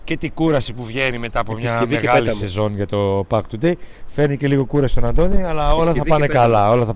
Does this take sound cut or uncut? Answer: uncut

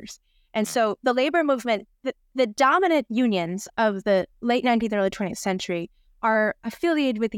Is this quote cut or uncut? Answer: cut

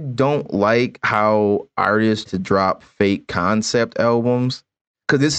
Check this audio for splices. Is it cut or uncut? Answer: cut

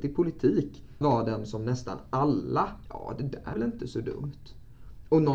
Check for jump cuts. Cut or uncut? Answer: cut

